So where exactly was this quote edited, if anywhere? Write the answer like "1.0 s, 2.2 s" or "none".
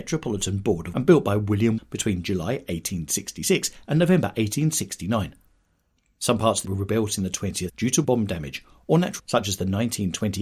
0.9 s, 1.8 s, 6.6 s, 7.7 s, 8.0 s, 9.2 s